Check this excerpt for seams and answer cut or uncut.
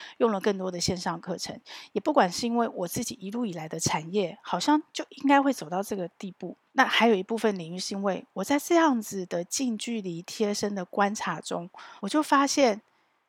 cut